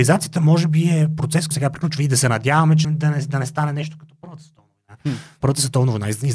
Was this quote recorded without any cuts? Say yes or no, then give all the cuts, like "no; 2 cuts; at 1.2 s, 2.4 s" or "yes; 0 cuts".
no; 3 cuts; at 1.5 s, 2.8 s, 5.4 s